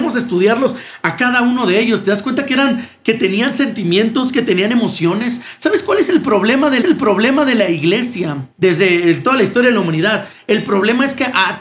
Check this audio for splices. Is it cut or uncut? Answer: cut